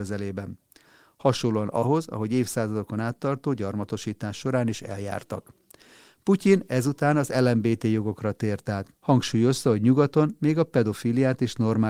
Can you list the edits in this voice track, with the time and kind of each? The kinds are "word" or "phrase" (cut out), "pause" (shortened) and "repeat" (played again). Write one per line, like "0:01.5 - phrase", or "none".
0:08.9 - pause